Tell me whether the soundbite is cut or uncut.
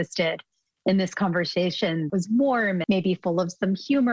cut